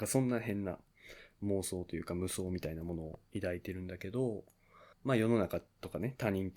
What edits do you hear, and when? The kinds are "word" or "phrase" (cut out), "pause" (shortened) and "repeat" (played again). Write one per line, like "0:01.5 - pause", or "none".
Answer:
0:04.9 - pause

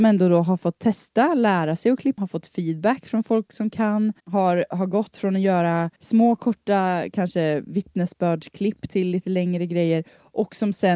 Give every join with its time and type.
0:02.2 - word
0:04.2 - pause
0:06.0 - pause

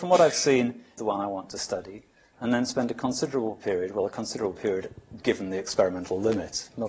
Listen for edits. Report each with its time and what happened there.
0:01.0 - phrase

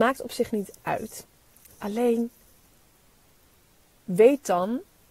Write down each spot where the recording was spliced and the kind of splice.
none

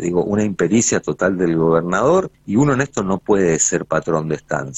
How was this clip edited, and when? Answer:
0:02.3 - pause

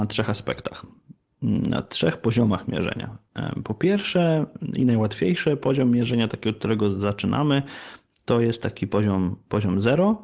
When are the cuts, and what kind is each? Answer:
none

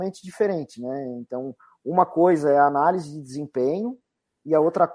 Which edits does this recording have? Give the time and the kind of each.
none

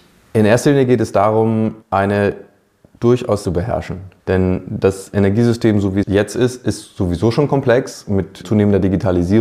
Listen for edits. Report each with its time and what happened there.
0:01.8 - pause
0:03.4 - phrase
0:04.2 - pause
0:06.0 - word
0:08.4 - word

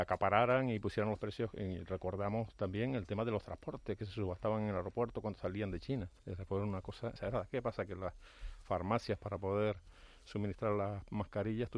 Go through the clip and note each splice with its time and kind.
0:06.2 - pause
0:07.2 - word

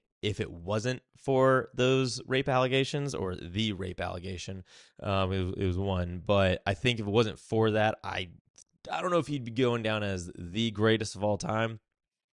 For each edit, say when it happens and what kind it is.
none

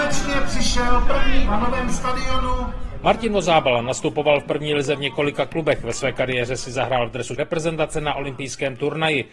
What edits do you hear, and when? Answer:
0:01.5 - word
0:07.4 - word

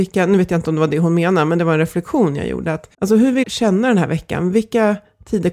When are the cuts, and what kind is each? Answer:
0:02.9 - pause
0:03.4 - word

